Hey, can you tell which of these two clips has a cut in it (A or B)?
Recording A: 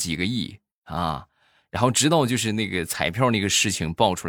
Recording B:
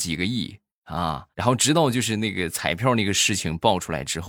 B